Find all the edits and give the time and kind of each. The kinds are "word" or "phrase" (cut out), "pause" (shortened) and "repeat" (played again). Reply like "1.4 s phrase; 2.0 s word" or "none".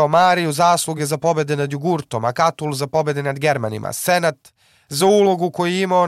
none